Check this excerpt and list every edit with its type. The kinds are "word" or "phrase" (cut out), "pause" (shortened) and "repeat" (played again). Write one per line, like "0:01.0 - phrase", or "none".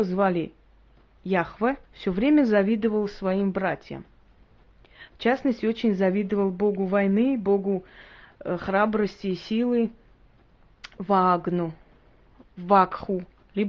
0:01.8 - pause